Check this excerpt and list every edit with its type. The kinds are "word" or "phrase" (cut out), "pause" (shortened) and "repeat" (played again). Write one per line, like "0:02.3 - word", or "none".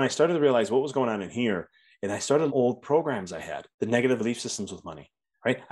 0:02.5 - phrase
0:03.7 - pause
0:04.2 - word